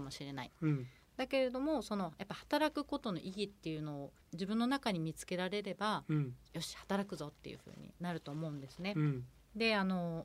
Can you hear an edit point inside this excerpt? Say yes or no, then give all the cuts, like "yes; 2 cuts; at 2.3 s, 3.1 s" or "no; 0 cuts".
yes; 1 cut; at 4.2 s